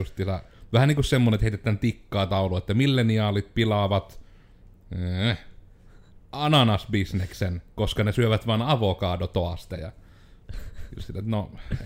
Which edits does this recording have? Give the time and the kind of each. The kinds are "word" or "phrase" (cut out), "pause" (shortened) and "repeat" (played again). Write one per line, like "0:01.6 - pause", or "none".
0:06.2 - pause